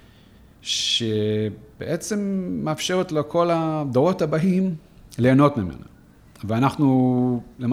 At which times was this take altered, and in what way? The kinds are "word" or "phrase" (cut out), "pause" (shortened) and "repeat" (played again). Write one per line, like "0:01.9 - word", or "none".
none